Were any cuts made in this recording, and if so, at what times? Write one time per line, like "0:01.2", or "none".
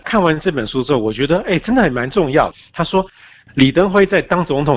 none